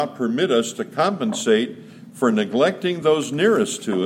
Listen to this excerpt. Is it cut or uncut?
uncut